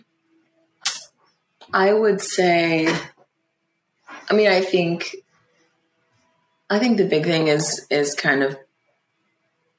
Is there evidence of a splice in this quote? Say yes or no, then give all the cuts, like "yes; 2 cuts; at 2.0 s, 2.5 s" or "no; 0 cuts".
no; 0 cuts